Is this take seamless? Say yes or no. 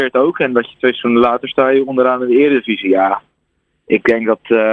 yes